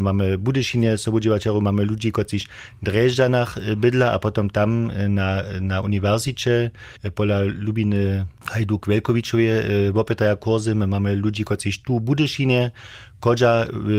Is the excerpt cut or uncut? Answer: cut